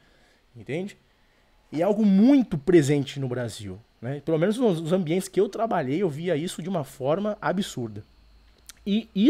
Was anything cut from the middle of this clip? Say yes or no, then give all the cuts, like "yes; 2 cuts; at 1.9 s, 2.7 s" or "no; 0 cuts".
no; 0 cuts